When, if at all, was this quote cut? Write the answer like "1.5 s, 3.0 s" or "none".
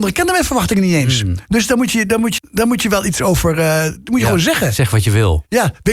2.4 s